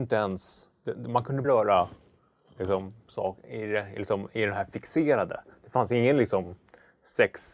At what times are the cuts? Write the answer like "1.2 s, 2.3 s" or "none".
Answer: 1.4 s